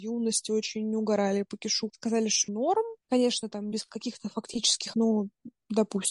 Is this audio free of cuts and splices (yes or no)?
no